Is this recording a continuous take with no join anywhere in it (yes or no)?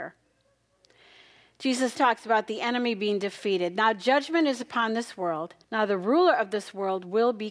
no